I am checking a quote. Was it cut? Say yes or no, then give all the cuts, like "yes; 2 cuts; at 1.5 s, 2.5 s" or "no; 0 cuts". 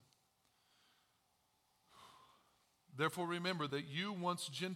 no; 0 cuts